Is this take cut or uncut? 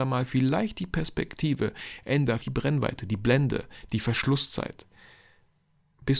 cut